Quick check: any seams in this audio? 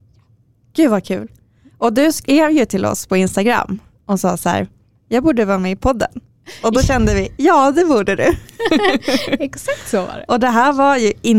no; 0 cuts

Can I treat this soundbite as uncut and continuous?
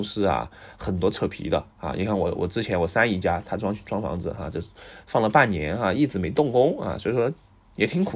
no; 1 cut; at 1.7 s

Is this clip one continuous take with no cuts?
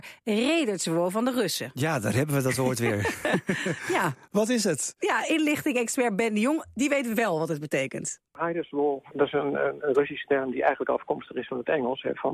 no; 1 cut; at 8.3 s

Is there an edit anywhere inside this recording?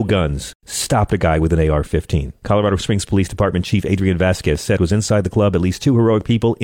yes; 2 cuts; at 2.4 s, 4.8 s

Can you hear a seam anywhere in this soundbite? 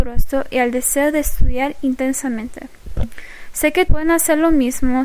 yes; 1 cut; at 3.9 s

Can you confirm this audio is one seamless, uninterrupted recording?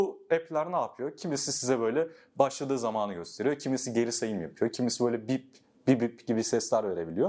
yes; 0 cuts

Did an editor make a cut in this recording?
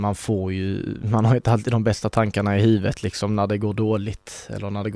no; 0 cuts

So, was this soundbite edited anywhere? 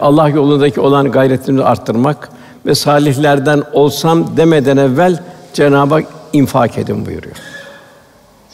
no; 0 cuts

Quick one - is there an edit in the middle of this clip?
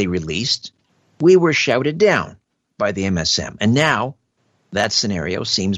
no; 0 cuts

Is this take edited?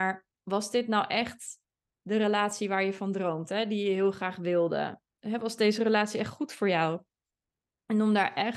yes; 1 cut; at 5.1 s

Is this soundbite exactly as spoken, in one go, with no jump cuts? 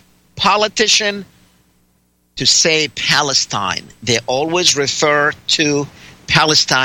yes; 0 cuts

